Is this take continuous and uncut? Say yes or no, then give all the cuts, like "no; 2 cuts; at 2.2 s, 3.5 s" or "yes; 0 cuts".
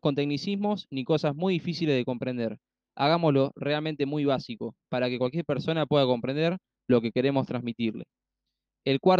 yes; 0 cuts